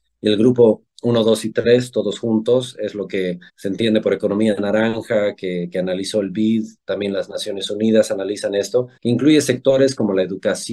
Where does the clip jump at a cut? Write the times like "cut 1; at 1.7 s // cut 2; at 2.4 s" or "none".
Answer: cut 1; at 3.5 s // cut 2; at 9.0 s